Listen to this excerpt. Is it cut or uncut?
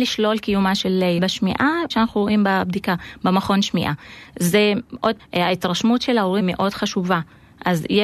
cut